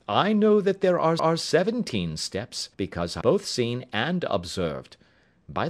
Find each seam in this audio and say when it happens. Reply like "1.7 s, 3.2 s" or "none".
1.2 s, 2.7 s, 3.2 s